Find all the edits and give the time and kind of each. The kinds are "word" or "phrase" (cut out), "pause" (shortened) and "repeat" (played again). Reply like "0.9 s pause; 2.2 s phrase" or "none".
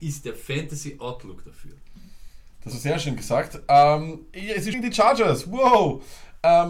2.7 s word; 4.7 s word